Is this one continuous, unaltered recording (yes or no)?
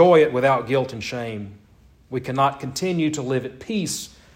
yes